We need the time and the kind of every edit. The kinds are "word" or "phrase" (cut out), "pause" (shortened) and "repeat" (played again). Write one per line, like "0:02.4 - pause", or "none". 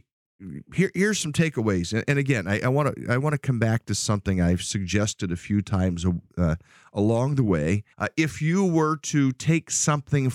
0:07.9 - pause